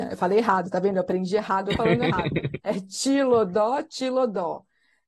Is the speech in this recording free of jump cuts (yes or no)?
no